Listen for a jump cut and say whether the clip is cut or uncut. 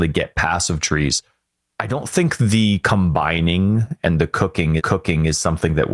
cut